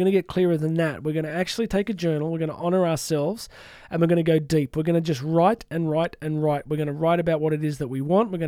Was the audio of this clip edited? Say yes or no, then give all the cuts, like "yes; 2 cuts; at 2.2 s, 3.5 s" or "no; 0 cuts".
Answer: no; 0 cuts